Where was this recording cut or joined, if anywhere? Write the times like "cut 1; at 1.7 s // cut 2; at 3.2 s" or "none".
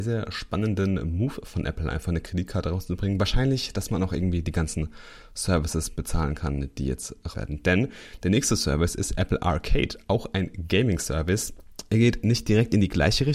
cut 1; at 7.3 s

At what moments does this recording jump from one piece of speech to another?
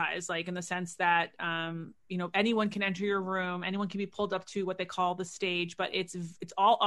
none

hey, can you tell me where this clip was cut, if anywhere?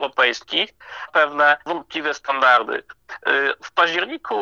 cut 1; at 1.1 s

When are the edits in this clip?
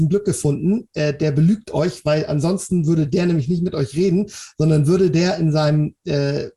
none

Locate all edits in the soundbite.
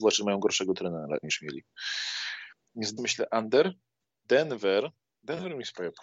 cut 1; at 1.2 s // cut 2; at 3.0 s // cut 3; at 4.2 s

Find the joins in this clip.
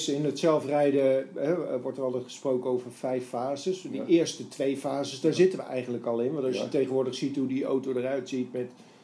none

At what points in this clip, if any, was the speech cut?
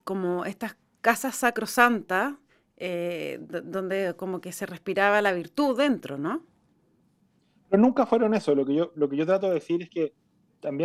cut 1; at 2.5 s

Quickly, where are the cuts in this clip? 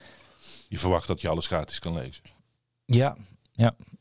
none

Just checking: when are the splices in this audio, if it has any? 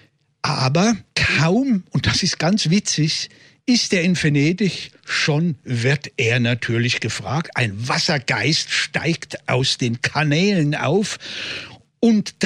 cut 1; at 1.1 s

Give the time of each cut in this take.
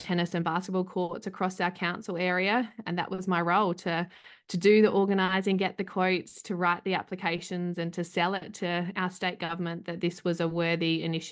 none

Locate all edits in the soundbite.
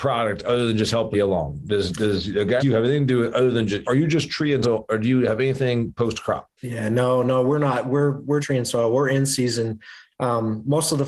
cut 1; at 1.1 s // cut 2; at 2.6 s // cut 3; at 3.8 s // cut 4; at 4.6 s // cut 5; at 6.6 s // cut 6; at 8.4 s

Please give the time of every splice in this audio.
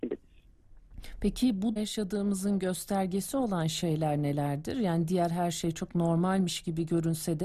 cut 1; at 1.8 s

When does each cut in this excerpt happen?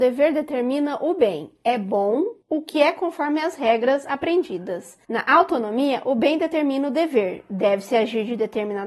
none

